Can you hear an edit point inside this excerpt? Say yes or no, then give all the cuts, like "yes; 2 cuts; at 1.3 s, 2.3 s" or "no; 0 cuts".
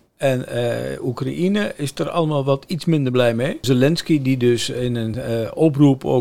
no; 0 cuts